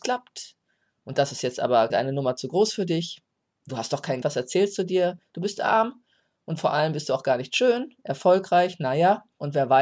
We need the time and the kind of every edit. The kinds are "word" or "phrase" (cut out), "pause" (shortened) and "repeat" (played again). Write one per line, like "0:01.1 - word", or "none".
0:01.9 - word
0:04.2 - word